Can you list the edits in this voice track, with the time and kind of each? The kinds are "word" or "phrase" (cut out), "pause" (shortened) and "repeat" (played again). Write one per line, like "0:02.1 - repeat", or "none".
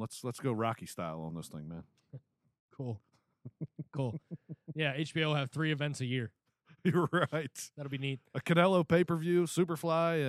none